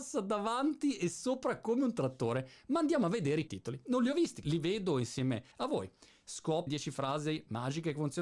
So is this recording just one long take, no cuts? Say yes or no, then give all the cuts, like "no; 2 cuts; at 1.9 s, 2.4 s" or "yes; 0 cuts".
no; 4 cuts; at 3.5 s, 4.4 s, 5.5 s, 6.7 s